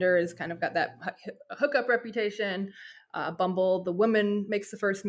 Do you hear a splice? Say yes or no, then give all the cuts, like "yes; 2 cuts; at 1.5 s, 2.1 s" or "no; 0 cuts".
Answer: no; 0 cuts